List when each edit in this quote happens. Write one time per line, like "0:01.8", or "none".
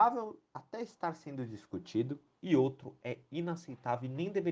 0:02.3